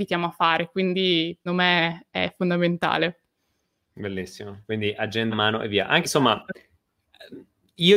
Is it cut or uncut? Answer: cut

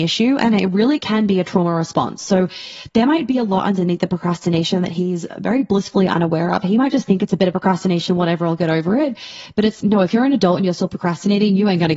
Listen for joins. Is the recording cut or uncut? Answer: cut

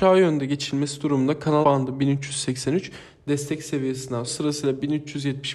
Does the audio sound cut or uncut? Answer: cut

